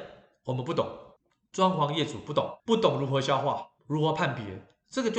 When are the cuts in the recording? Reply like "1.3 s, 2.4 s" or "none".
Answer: 1.2 s, 2.6 s, 3.8 s

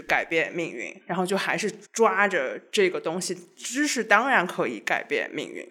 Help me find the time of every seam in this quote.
1.0 s, 1.9 s

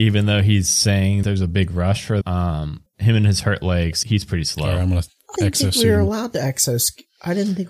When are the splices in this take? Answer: 1.2 s, 2.2 s, 2.9 s, 4.0 s, 5.4 s

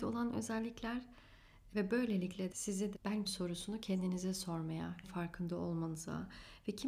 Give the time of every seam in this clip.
1.7 s, 2.5 s, 2.9 s, 3.2 s, 5.0 s

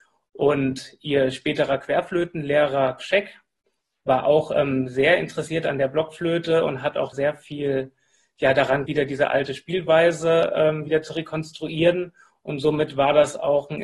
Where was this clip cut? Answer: 3.0 s, 7.1 s, 8.9 s

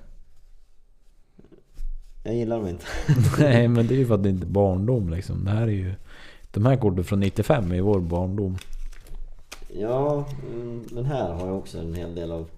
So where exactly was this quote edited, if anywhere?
4.4 s

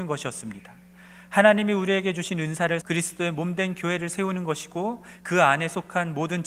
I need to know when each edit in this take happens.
2.8 s

